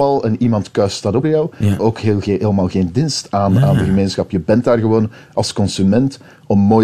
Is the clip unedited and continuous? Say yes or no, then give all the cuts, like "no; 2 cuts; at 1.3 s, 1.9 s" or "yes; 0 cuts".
no; 2 cuts; at 1.2 s, 1.8 s